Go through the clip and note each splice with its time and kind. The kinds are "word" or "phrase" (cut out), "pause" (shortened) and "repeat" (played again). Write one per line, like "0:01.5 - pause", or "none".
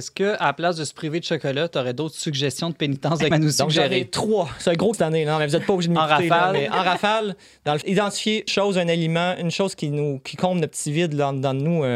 0:03.3 - word
0:04.9 - word
0:07.8 - word
0:08.5 - word